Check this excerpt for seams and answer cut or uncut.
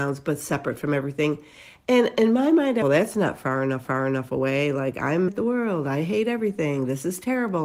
cut